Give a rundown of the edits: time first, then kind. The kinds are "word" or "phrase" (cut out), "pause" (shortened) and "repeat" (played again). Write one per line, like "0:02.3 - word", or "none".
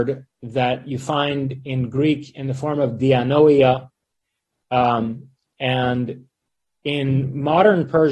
none

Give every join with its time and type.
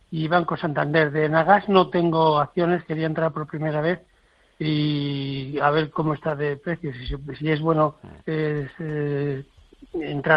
0:08.2 - pause

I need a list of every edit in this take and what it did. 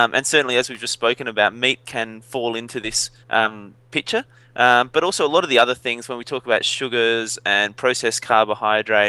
0:03.2 - pause

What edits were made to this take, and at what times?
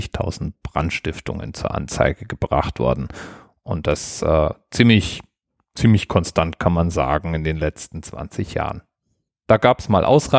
none

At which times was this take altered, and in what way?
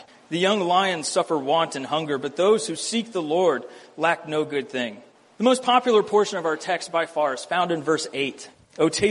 none

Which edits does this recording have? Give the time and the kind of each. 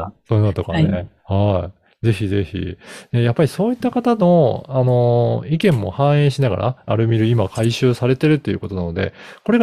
0:01.2 - pause
0:06.9 - word

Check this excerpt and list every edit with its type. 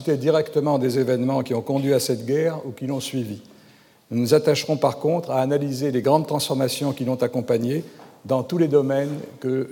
none

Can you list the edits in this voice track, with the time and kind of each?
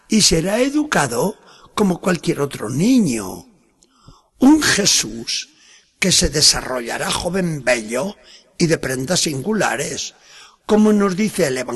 none

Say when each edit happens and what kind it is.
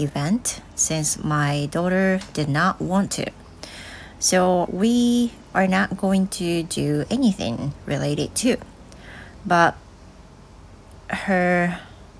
0:04.6 - phrase

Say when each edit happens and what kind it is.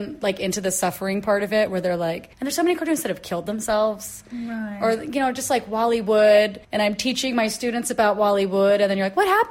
0:02.3 - pause
0:06.6 - pause

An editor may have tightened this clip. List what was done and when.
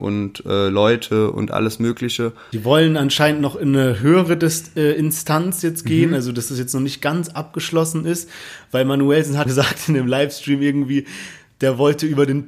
0:09.5 - word

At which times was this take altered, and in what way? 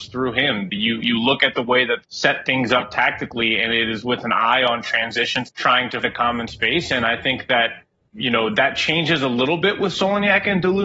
0:02.0 - word
0:05.5 - word
0:06.0 - word
0:08.1 - word

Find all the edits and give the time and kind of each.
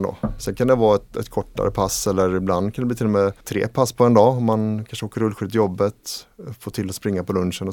0:03.4 - pause

